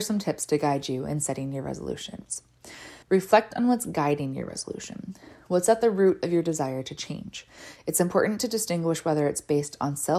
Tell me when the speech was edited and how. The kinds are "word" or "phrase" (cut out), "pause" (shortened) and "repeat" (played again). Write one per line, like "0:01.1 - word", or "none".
0:03.0 - pause